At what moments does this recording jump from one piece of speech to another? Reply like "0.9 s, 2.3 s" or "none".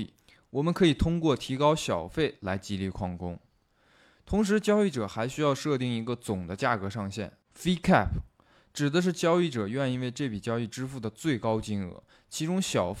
none